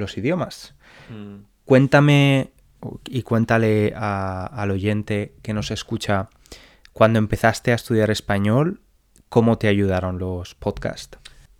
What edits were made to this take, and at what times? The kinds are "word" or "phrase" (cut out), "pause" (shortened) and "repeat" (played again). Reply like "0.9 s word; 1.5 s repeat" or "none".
none